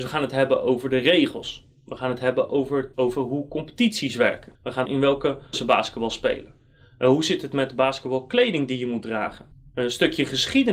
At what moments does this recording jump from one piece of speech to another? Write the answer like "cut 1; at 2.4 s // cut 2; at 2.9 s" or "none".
cut 1; at 2.9 s // cut 2; at 4.5 s // cut 3; at 4.9 s // cut 4; at 5.5 s